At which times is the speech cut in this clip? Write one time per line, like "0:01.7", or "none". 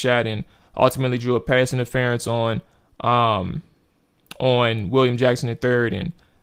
none